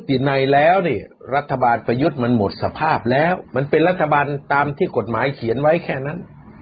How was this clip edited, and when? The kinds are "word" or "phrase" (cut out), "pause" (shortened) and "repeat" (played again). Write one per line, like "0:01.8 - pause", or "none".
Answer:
0:03.5 - pause